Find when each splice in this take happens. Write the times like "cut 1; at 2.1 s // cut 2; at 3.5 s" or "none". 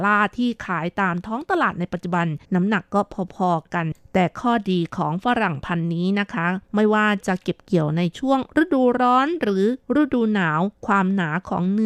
cut 1; at 2.4 s

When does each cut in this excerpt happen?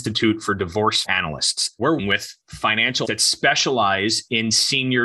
cut 1; at 1.0 s // cut 2; at 2.0 s // cut 3; at 3.0 s

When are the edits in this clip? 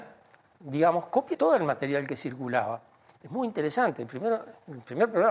cut 1; at 1.3 s

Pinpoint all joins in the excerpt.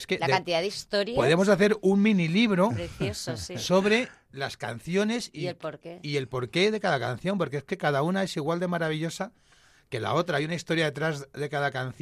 none

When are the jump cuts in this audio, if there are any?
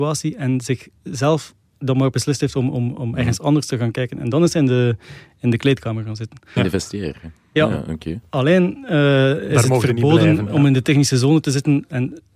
cut 1; at 1.6 s

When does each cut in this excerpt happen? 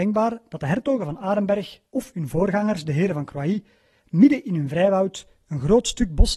cut 1; at 1.9 s

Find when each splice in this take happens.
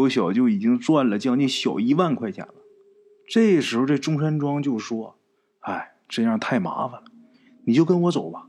none

